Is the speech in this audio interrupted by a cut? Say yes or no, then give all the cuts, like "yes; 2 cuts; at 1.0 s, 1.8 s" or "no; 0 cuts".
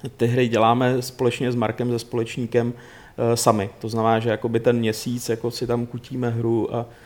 no; 0 cuts